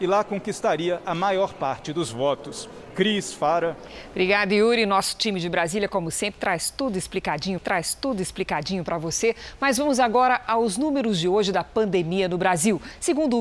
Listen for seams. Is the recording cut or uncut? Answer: cut